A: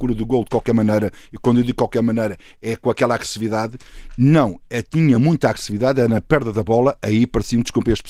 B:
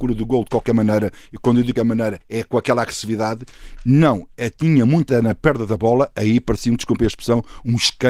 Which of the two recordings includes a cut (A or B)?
B